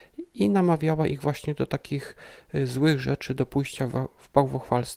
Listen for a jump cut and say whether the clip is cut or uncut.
uncut